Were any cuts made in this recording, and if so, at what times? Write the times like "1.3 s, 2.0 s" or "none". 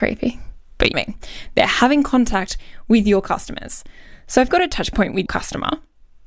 0.9 s, 4.5 s, 5.3 s